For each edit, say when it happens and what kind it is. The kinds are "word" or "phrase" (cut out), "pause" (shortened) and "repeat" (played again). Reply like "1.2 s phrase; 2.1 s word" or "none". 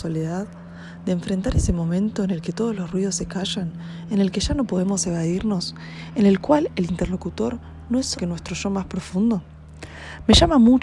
8.1 s word